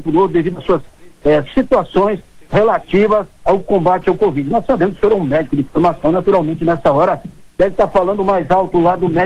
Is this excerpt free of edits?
no; 1 cut; at 3.4 s

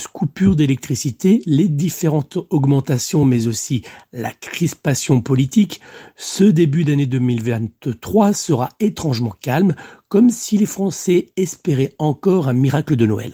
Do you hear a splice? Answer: no; 0 cuts

